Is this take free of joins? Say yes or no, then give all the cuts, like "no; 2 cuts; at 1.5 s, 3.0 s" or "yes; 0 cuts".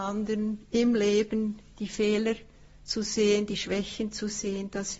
yes; 0 cuts